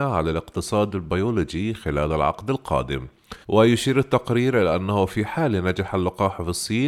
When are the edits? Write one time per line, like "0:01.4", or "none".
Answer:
0:03.4

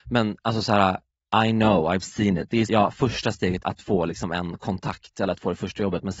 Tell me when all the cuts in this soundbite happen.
0:02.7
0:03.6

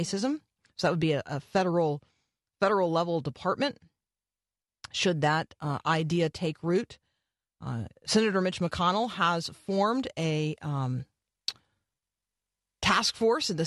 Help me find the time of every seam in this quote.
0:08.0

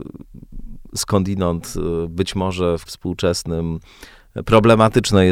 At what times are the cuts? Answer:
0:02.9

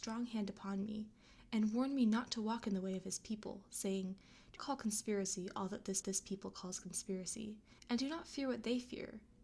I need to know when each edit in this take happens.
0:04.6
0:06.0
0:07.8

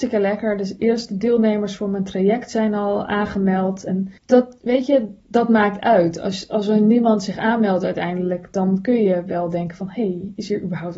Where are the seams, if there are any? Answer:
0:04.2

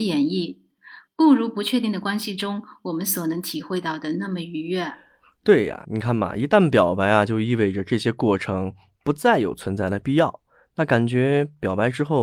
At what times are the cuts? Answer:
0:05.8

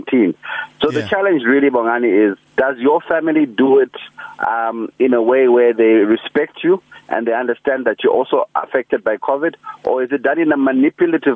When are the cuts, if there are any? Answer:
0:02.5

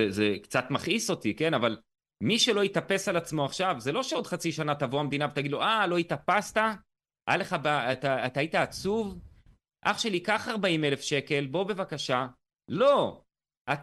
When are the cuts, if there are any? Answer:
none

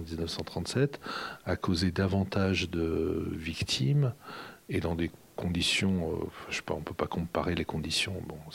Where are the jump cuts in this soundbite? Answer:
none

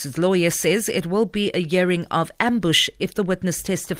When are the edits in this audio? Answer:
none

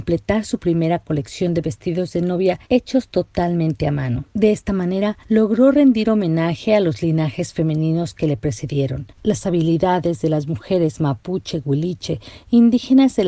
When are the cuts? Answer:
0:02.6
0:04.3
0:05.2
0:09.1

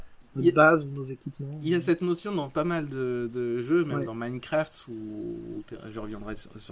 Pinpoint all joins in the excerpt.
none

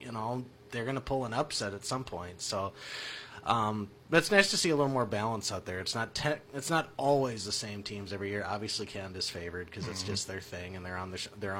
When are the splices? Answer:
none

